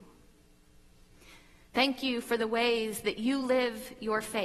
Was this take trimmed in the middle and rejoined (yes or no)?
no